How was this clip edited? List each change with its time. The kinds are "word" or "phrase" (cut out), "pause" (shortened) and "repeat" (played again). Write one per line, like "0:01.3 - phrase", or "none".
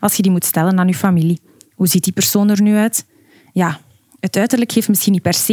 none